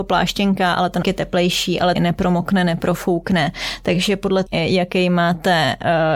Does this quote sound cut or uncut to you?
cut